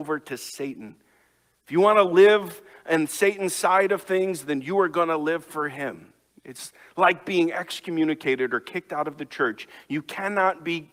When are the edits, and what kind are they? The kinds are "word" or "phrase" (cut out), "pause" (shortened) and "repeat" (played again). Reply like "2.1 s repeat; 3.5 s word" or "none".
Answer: none